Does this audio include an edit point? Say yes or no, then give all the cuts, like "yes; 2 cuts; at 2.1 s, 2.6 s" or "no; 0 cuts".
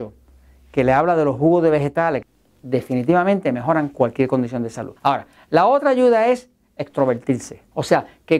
yes; 1 cut; at 5.0 s